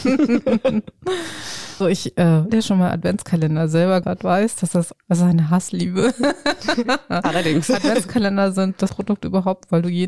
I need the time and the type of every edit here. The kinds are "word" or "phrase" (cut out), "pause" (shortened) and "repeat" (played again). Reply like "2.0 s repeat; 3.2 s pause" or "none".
1.8 s word; 2.5 s word; 4.0 s word; 4.9 s word; 8.9 s word